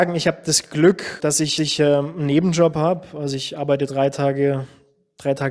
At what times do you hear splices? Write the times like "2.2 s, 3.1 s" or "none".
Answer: 1.2 s, 1.6 s